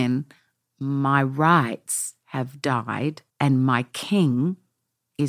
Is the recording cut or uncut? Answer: cut